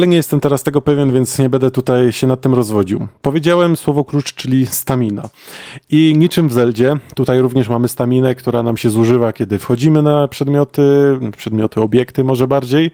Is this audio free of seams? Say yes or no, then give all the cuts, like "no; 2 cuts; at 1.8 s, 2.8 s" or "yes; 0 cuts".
yes; 0 cuts